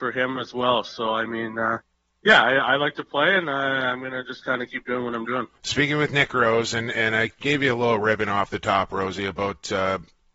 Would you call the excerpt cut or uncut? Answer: cut